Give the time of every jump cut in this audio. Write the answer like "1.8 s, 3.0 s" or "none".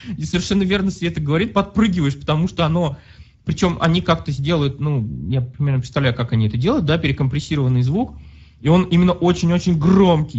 none

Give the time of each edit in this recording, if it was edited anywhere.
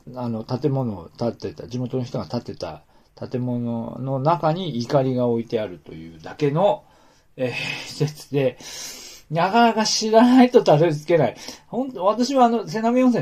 none

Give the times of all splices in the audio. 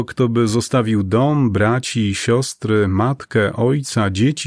none

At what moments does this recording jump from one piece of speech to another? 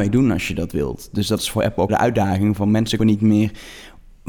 1.9 s, 3.0 s

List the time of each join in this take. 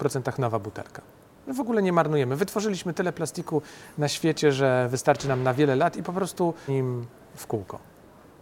6.7 s

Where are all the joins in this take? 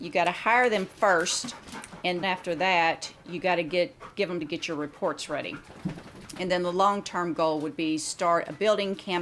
2.2 s, 4.4 s

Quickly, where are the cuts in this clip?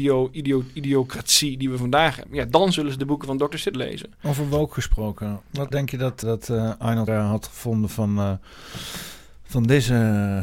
3.7 s, 5.7 s, 6.2 s, 7.1 s

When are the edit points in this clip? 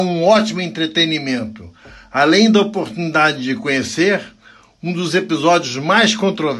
none

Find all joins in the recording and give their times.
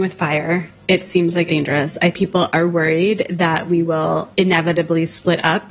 1.5 s, 2.1 s, 4.3 s

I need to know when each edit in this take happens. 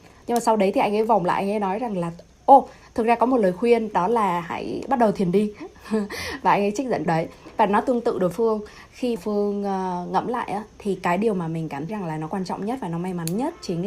7.1 s, 8.3 s, 9.2 s, 11.9 s

